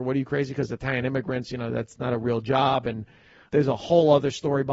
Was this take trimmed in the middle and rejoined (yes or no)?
yes